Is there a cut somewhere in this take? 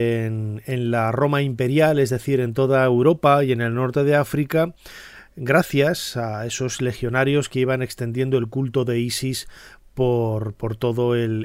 no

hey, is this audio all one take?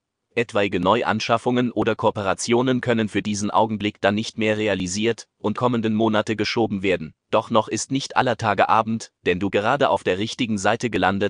no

